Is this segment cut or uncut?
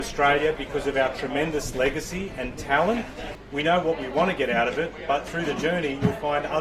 uncut